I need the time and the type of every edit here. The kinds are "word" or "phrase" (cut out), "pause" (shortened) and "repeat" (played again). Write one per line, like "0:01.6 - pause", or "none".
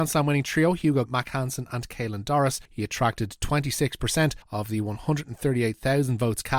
0:01.1 - word
0:02.7 - pause
0:04.4 - pause